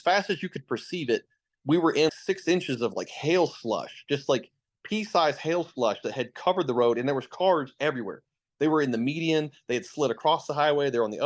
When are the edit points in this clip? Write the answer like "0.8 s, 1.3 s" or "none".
2.1 s